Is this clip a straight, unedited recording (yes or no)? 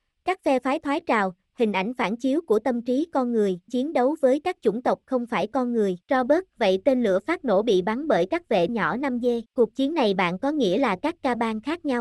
no